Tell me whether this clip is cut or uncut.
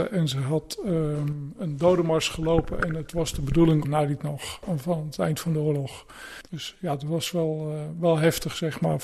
cut